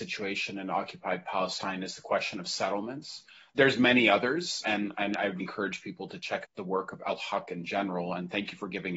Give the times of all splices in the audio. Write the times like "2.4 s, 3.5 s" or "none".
4.6 s, 5.4 s, 6.4 s